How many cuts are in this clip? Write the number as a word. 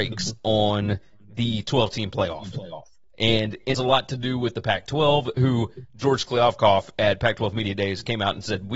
one